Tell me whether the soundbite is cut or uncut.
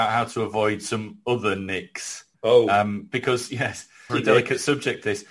cut